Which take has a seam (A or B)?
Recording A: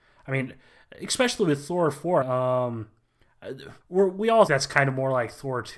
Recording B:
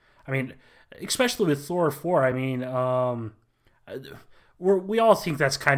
A